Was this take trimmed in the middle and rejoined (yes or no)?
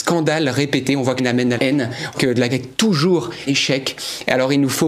yes